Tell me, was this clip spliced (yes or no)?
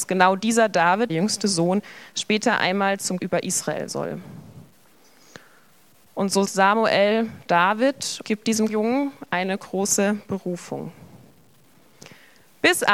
yes